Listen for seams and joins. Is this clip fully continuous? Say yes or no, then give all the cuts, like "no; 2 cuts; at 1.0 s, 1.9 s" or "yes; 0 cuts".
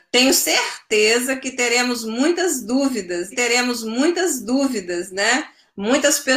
no; 1 cut; at 3.3 s